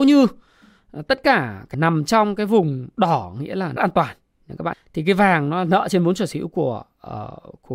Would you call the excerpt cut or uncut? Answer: cut